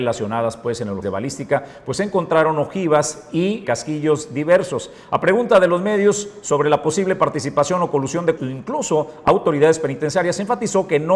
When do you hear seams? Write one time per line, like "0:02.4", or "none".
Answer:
0:01.0
0:03.6
0:08.4